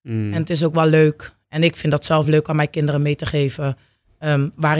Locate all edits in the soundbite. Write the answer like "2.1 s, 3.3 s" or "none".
none